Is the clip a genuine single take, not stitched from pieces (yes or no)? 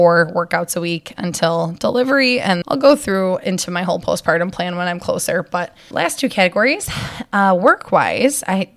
no